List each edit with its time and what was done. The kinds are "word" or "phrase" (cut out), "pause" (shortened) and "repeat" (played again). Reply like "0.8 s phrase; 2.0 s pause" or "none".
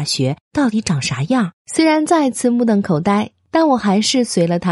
1.6 s pause